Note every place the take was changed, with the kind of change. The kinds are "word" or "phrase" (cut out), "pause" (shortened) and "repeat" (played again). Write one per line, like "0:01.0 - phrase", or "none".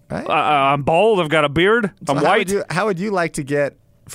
none